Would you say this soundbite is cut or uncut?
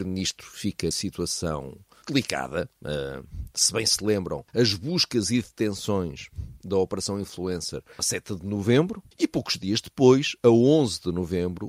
cut